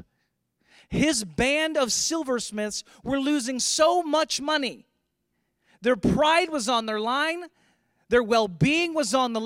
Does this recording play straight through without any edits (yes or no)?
yes